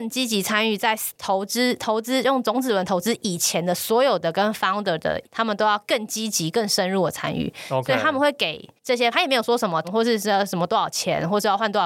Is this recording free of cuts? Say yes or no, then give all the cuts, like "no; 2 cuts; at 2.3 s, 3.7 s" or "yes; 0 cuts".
no; 4 cuts; at 5.2 s, 8.8 s, 9.1 s, 9.8 s